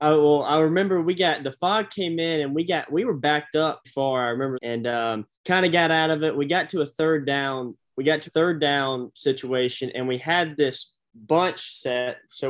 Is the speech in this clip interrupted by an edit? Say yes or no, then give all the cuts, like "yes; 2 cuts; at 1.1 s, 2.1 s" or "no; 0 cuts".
yes; 4 cuts; at 3.8 s, 4.5 s, 5.3 s, 8.3 s